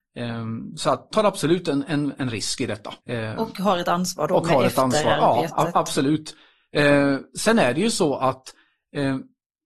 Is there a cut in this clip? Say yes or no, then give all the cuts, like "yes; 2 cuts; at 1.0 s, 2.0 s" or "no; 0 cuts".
yes; 2 cuts; at 1.1 s, 3.0 s